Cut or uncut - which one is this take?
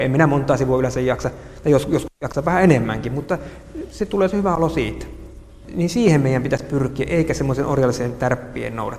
uncut